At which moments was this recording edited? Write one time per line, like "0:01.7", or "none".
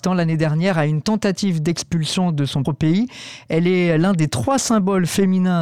0:02.6